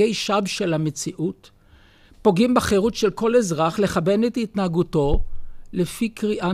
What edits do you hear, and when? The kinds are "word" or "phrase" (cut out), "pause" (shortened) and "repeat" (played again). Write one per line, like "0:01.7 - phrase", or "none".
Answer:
none